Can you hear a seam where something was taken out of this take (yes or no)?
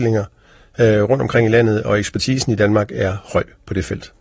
no